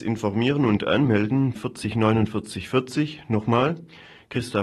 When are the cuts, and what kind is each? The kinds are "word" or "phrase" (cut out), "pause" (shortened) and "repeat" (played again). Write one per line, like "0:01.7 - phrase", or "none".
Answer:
0:01.5 - phrase